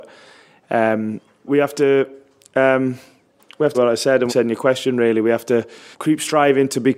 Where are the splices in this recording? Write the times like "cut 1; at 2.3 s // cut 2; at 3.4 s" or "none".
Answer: cut 1; at 1.5 s // cut 2; at 3.7 s // cut 3; at 4.3 s // cut 4; at 5.9 s